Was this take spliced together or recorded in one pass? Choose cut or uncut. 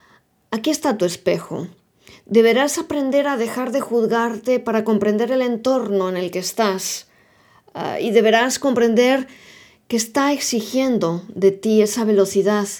uncut